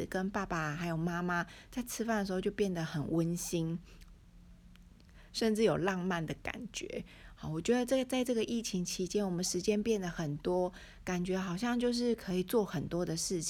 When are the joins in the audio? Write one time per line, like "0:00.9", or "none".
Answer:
none